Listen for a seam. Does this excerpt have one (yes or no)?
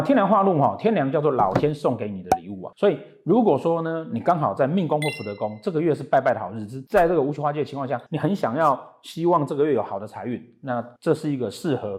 yes